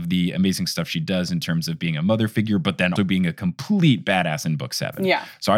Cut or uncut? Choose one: cut